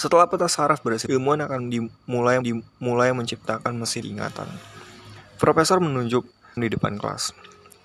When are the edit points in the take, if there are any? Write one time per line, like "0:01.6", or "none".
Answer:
0:01.1
0:02.4
0:04.0
0:06.6